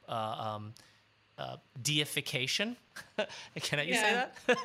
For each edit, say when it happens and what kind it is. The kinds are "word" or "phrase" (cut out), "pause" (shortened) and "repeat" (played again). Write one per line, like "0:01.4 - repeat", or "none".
none